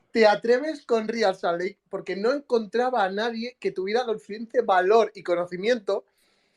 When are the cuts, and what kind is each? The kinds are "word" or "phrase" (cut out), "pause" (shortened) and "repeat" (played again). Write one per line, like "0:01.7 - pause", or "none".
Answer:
none